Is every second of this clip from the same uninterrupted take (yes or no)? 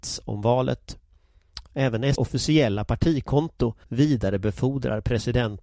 no